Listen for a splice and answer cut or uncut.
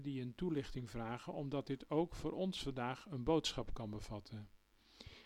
uncut